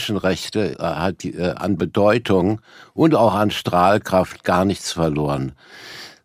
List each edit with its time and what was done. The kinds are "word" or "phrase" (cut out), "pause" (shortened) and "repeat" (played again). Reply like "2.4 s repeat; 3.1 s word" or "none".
none